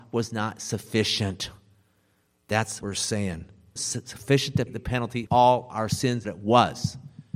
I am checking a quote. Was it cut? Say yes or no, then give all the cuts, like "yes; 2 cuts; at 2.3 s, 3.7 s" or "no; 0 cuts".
yes; 5 cuts; at 2.8 s, 3.8 s, 4.7 s, 5.3 s, 6.2 s